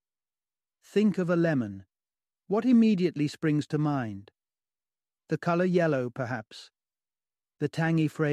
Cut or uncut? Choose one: uncut